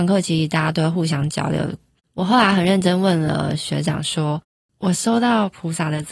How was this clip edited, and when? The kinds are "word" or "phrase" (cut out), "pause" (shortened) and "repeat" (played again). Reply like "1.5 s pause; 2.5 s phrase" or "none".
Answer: none